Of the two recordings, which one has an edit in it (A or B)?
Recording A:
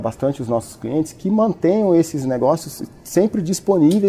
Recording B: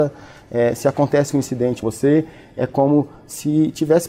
B